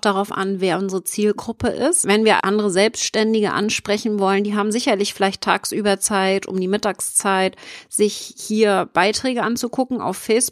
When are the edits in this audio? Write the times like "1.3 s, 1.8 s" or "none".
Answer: 2.4 s